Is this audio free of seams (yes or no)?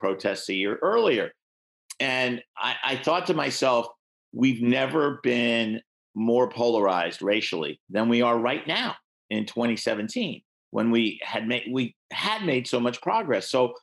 yes